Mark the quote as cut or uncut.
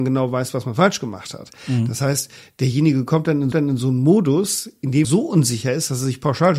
cut